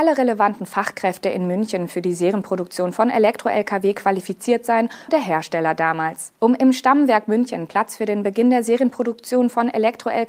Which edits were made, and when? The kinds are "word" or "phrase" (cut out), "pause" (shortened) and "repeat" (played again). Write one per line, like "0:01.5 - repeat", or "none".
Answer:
0:05.1 - word
0:06.4 - pause